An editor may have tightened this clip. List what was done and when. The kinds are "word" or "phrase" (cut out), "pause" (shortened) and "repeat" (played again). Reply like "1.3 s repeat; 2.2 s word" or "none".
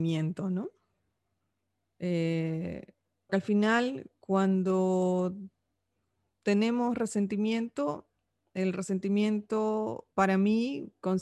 3.3 s word; 10.1 s pause